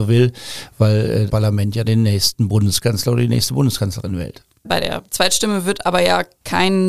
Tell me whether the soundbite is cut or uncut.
cut